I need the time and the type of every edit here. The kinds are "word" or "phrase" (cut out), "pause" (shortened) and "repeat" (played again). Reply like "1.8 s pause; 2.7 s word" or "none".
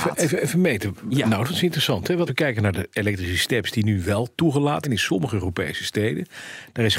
2.3 s word; 4.8 s word